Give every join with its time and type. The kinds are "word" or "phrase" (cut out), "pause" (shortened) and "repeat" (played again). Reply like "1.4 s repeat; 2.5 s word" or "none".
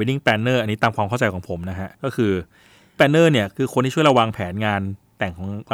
1.9 s pause; 3.0 s word